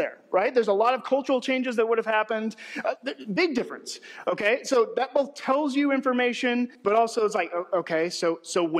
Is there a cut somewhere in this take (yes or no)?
yes